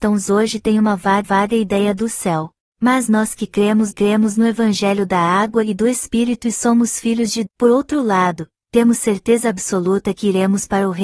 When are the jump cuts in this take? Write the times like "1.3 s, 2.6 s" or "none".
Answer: 1.2 s, 2.6 s, 3.9 s, 7.5 s